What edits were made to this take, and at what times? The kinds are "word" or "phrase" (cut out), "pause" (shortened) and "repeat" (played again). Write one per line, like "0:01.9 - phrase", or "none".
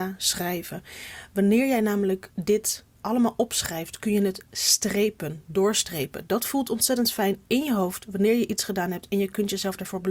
0:02.9 - pause